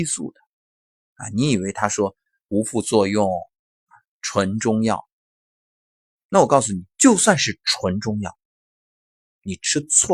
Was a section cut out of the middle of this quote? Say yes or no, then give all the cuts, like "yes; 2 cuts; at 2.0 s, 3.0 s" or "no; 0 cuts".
yes; 1 cut; at 6.9 s